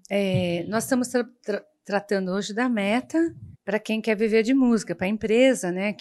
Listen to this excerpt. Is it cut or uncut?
cut